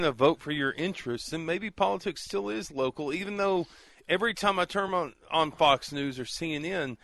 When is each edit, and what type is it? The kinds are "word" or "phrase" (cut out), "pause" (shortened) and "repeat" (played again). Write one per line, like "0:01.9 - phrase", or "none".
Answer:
none